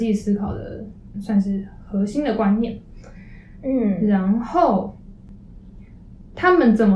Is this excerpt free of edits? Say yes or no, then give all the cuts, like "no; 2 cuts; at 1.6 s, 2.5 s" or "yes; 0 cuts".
no; 1 cut; at 1.1 s